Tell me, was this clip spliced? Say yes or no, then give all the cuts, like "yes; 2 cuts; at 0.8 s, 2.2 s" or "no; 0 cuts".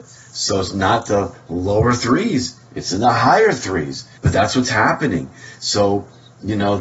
yes; 1 cut; at 4.2 s